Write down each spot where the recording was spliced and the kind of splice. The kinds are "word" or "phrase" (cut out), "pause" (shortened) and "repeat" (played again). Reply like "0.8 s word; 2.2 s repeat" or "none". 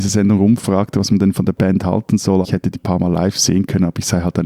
2.4 s word; 2.7 s word

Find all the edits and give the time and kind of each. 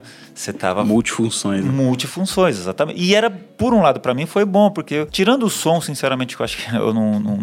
none

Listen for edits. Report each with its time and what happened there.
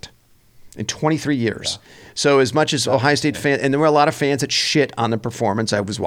none

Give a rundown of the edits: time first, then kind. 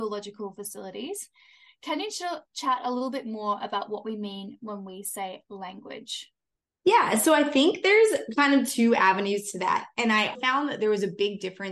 10.3 s word

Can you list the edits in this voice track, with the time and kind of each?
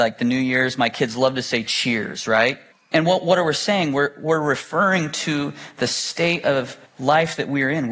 2.7 s pause; 6.9 s pause

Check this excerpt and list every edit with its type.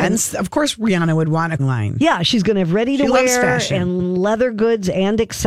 1.6 s word; 4.0 s repeat

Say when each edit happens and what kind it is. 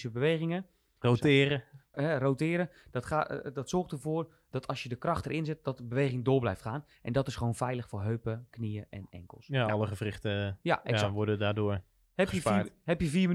1.9 s word; 4.5 s word

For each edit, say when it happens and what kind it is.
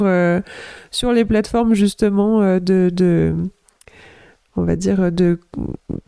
none

